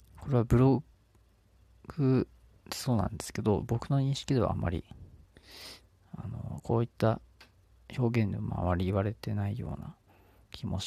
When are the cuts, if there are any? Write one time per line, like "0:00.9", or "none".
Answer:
none

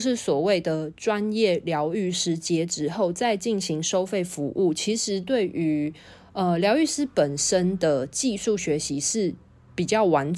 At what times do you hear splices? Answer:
none

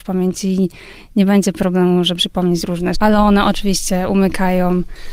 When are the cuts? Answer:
0:02.2
0:02.9

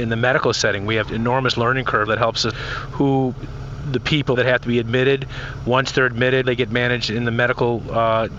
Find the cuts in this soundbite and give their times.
0:01.0
0:02.1
0:02.5
0:04.3
0:06.4

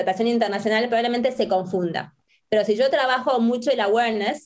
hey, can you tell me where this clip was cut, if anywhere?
none

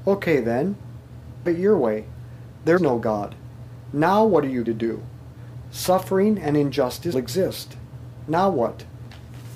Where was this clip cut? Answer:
0:01.5
0:02.8
0:04.7
0:07.1

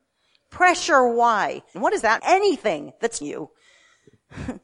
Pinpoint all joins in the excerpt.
0:01.7
0:02.2
0:03.2

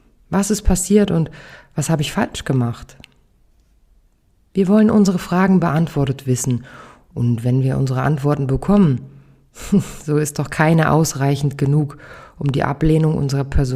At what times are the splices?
none

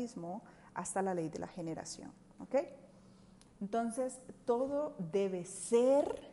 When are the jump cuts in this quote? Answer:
0:02.4

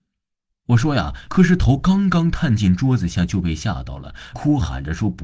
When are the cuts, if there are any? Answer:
0:01.3
0:04.3

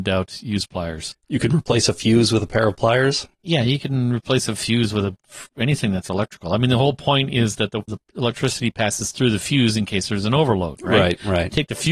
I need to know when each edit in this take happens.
0:03.3
0:07.9

